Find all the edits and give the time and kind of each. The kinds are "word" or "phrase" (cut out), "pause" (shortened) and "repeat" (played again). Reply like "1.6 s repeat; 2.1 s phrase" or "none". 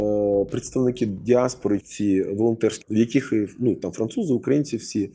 1.8 s word; 2.8 s word